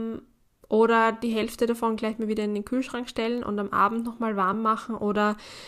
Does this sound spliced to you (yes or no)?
no